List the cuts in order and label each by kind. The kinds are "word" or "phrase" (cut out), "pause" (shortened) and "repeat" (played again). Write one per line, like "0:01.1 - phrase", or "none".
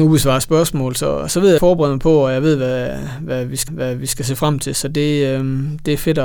0:01.6 - phrase
0:03.7 - repeat